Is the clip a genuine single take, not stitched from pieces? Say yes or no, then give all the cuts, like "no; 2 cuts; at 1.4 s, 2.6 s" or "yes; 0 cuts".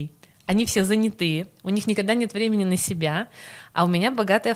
yes; 0 cuts